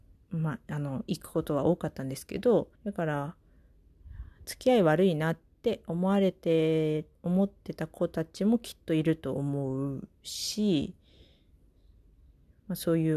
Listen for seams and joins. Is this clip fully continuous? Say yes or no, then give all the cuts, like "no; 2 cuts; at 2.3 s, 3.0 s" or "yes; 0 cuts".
no; 1 cut; at 2.7 s